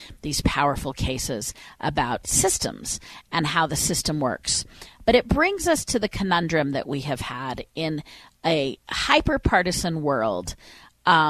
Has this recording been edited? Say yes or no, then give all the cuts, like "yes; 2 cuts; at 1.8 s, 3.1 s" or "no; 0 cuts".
no; 0 cuts